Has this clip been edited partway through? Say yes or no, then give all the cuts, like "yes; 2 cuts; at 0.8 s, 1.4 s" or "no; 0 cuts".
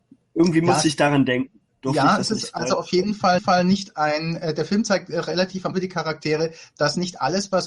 yes; 3 cuts; at 1.7 s, 3.4 s, 5.7 s